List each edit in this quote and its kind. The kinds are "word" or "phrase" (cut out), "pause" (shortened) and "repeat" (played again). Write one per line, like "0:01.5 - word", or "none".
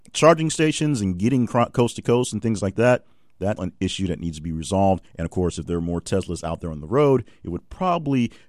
0:03.6 - word
0:05.1 - pause